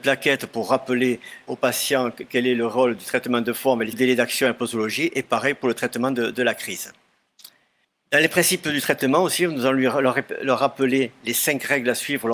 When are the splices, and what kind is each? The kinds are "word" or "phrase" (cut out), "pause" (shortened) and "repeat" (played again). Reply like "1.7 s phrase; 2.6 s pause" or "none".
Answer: 1.5 s word; 3.9 s phrase; 7.8 s pause